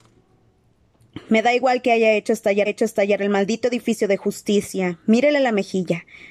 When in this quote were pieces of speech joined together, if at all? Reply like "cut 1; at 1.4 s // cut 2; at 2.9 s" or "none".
cut 1; at 2.7 s